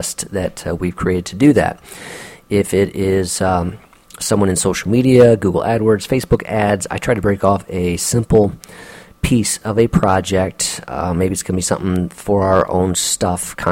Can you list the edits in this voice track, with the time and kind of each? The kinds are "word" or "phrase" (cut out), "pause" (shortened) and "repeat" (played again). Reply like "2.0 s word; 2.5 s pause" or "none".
none